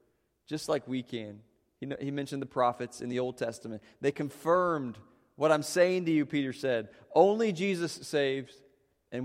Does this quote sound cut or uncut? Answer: uncut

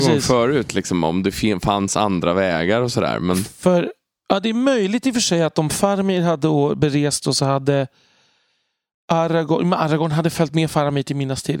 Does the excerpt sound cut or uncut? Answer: uncut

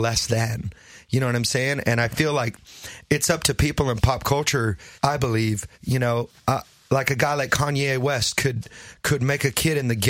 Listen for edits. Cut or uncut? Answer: cut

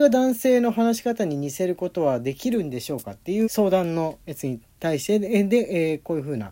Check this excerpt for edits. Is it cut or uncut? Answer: cut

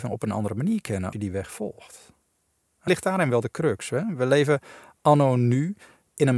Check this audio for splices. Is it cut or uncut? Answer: cut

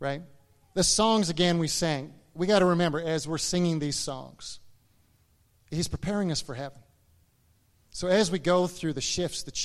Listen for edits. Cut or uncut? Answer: uncut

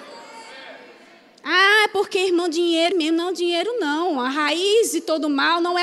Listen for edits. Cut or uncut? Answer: cut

